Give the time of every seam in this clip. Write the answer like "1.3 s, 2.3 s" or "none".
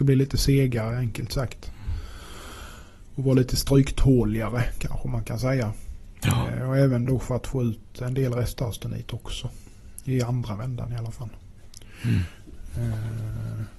none